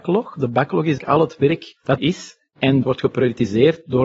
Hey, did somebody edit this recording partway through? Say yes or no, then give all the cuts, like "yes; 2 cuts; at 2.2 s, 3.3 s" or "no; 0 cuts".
yes; 3 cuts; at 1.0 s, 2.0 s, 2.8 s